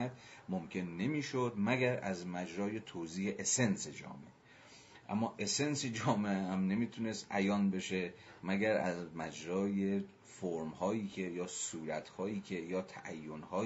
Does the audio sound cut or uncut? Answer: uncut